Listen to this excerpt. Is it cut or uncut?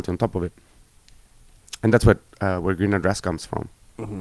uncut